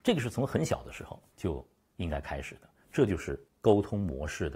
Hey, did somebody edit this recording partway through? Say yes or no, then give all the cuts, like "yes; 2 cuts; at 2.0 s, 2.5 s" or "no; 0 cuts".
no; 0 cuts